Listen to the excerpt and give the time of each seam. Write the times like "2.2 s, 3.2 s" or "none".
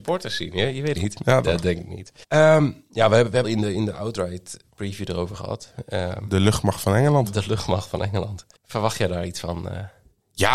0.9 s, 1.4 s, 2.2 s, 3.4 s, 8.6 s